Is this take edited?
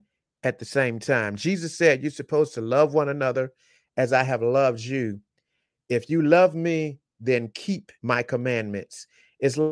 yes; 1 cut; at 8.0 s

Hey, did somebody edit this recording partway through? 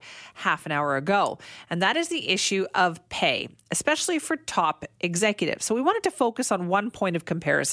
no; 0 cuts

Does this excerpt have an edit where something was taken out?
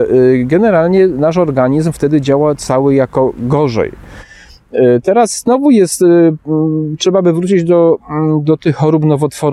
no; 0 cuts

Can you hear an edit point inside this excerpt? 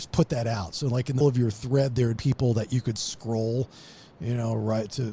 yes; 2 cuts; at 1.2 s, 2.2 s

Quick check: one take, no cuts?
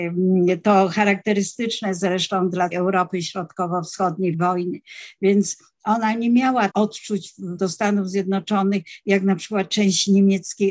no; 4 cuts; at 2.7 s, 4.3 s, 6.7 s, 7.6 s

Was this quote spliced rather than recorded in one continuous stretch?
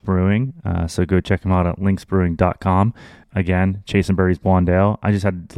no; 0 cuts

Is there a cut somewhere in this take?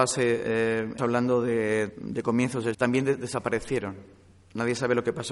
yes; 3 cuts; at 1.0 s, 1.9 s, 2.7 s

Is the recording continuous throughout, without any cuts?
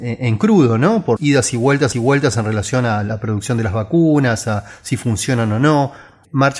no; 2 cuts; at 1.2 s, 1.9 s

